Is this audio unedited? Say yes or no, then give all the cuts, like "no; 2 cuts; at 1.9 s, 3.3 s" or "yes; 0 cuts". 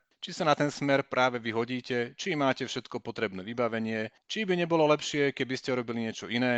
yes; 0 cuts